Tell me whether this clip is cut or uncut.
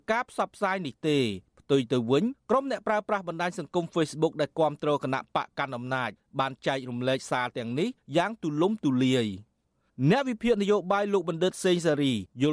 uncut